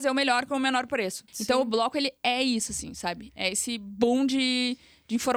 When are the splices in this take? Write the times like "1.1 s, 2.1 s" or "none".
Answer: 1.3 s